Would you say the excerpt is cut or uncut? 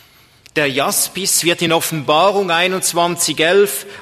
uncut